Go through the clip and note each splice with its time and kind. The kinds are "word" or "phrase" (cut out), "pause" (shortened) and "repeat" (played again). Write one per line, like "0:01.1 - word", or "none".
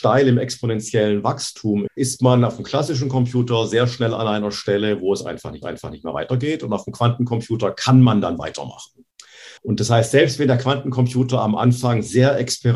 0:01.9 - word
0:05.6 - repeat
0:09.6 - pause